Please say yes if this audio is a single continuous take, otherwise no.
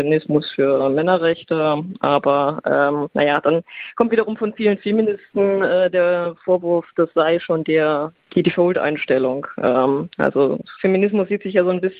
yes